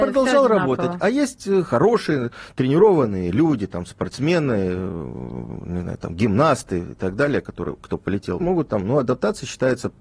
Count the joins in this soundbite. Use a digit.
1